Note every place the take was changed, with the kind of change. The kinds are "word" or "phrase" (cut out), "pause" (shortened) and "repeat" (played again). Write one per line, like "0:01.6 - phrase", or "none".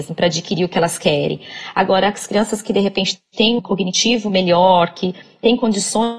0:03.6 - word